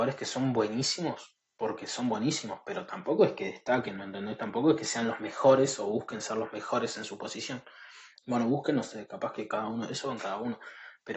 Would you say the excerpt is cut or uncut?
uncut